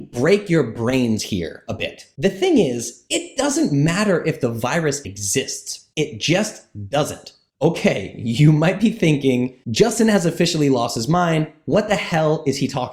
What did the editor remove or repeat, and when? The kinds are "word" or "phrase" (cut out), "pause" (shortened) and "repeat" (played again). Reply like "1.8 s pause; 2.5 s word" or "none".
5.0 s word